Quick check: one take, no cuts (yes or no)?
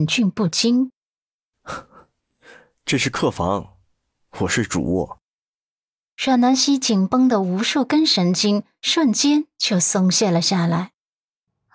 yes